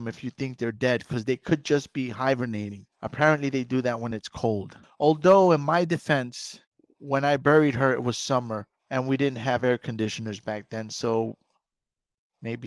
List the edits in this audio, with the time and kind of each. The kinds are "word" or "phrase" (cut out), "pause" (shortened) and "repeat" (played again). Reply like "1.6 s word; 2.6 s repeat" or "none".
none